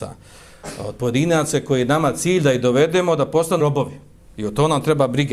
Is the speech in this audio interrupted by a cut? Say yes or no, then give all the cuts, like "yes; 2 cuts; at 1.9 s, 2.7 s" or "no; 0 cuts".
yes; 1 cut; at 3.6 s